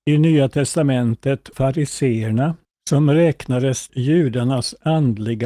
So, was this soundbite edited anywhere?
yes; 3 cuts; at 1.5 s, 2.6 s, 3.9 s

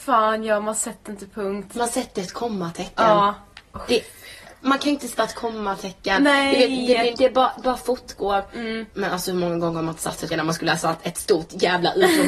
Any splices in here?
yes; 5 cuts; at 5.2 s, 7.1 s, 7.6 s, 8.9 s, 10.3 s

